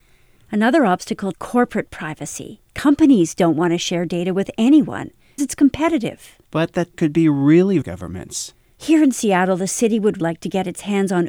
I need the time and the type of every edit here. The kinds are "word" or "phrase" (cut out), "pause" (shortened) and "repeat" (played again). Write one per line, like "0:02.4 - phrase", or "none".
0:01.3 - phrase
0:02.7 - pause
0:05.4 - word
0:06.4 - pause
0:06.9 - word
0:07.8 - phrase
0:10.2 - word